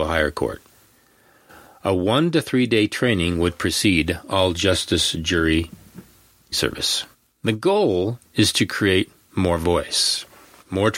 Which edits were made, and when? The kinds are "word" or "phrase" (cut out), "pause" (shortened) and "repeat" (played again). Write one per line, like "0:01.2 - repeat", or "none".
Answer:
0:06.5 - word
0:07.1 - pause
0:08.2 - pause